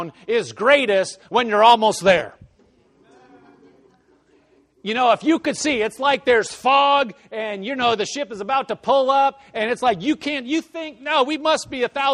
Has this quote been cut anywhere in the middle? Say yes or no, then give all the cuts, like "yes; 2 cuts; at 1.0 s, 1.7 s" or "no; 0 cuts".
no; 0 cuts